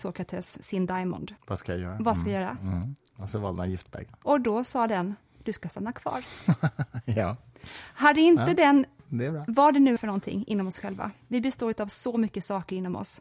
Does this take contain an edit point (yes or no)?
yes